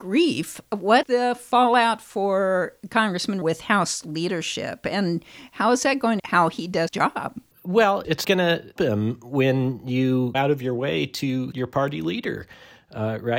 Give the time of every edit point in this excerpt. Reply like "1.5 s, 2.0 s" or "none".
1.0 s, 3.4 s, 6.2 s, 6.9 s, 8.2 s, 8.8 s, 10.3 s, 11.5 s

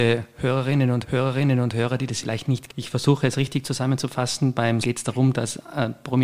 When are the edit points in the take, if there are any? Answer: 1.0 s, 2.2 s, 2.7 s, 4.8 s

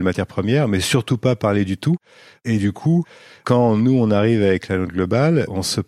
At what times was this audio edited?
none

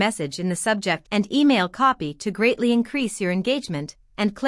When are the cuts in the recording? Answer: 1.0 s

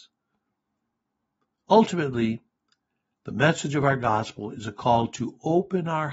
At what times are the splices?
none

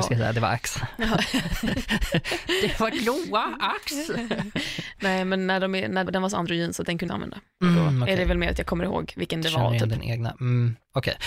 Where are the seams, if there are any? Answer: 2.9 s, 6.1 s, 7.1 s

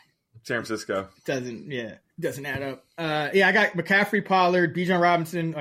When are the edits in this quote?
2.1 s

